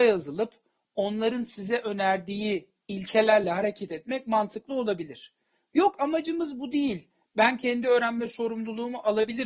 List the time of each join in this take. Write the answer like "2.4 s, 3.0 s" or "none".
none